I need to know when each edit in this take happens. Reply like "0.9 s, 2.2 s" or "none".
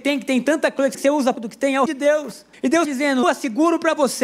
0.9 s, 1.3 s, 1.9 s, 2.5 s, 2.8 s, 3.2 s